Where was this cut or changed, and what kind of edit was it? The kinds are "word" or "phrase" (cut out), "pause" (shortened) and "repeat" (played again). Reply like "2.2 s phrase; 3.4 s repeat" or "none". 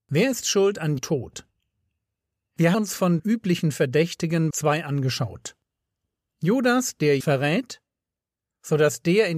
1.0 s word; 2.7 s word; 3.2 s word; 4.5 s word; 7.2 s word